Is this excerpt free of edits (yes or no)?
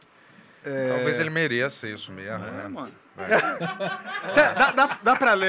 yes